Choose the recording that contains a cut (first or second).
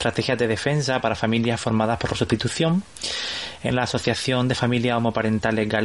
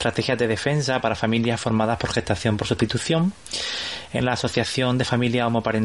first